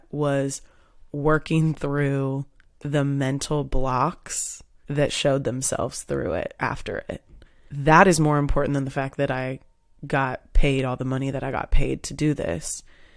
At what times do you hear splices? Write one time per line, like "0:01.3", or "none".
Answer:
0:06.6